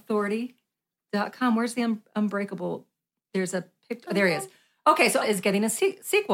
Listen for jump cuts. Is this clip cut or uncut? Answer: cut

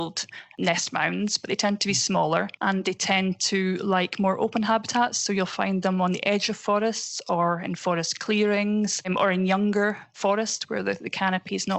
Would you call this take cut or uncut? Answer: uncut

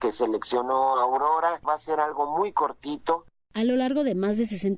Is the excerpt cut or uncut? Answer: uncut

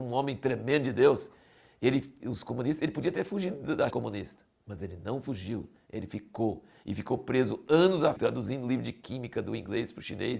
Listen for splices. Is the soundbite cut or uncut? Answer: cut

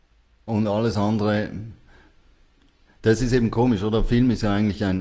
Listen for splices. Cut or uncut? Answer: uncut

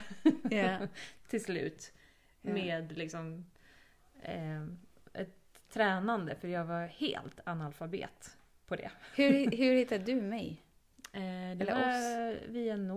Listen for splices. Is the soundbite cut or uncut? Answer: uncut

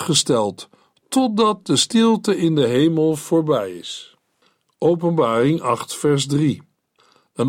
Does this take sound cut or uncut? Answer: uncut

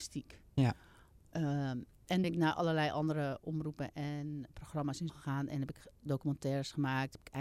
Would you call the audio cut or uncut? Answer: cut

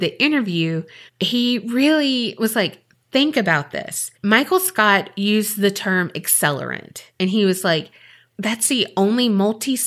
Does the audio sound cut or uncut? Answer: cut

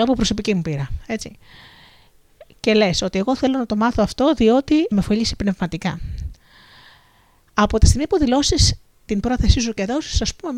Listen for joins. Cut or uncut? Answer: cut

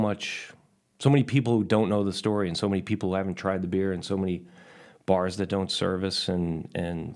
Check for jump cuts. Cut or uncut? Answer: uncut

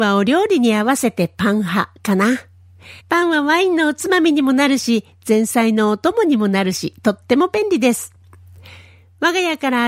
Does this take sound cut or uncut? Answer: cut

